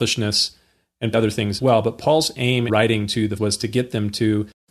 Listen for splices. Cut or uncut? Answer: cut